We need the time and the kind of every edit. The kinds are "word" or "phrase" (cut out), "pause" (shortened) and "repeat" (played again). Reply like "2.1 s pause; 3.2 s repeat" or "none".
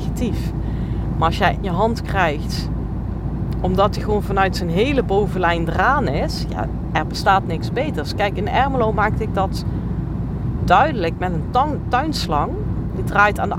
1.6 s phrase